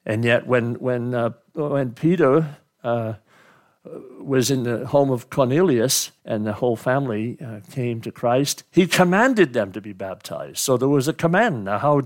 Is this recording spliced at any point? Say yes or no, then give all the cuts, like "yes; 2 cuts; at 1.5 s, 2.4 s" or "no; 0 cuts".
yes; 1 cut; at 6.2 s